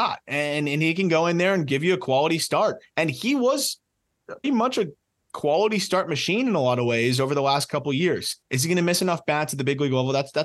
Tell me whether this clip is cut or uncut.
cut